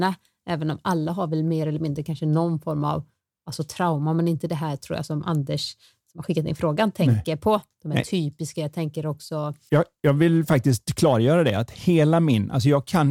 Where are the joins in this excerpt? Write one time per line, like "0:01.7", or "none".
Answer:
none